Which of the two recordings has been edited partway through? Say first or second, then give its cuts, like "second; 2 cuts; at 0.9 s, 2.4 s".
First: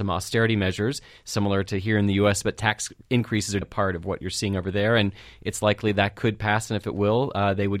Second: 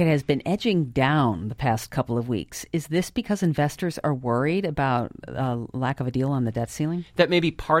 first; 1 cut; at 3.6 s